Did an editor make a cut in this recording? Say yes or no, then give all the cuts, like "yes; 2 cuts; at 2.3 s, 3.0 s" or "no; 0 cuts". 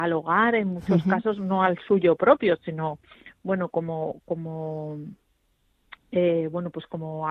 no; 0 cuts